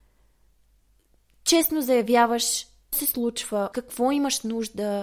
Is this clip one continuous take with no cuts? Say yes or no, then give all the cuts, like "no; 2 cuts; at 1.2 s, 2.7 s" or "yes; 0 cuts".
no; 2 cuts; at 2.9 s, 3.7 s